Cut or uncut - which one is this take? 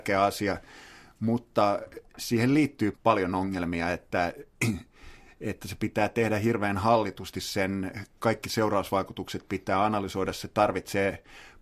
cut